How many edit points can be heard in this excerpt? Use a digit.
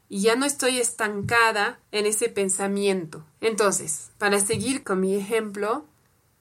2